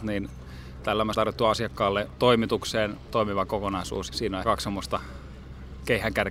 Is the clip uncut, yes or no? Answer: no